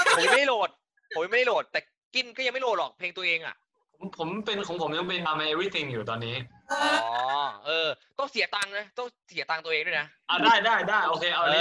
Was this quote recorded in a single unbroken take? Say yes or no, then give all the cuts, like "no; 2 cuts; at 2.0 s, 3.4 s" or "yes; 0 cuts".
no; 1 cut; at 5.3 s